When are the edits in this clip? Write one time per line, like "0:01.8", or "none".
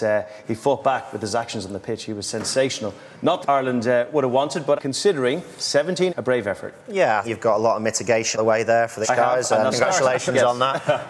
0:03.4
0:04.8
0:06.1
0:07.2
0:08.3
0:09.0
0:09.7